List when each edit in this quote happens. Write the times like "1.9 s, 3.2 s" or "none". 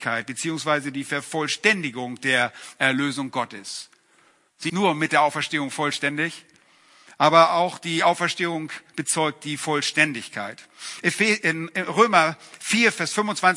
4.7 s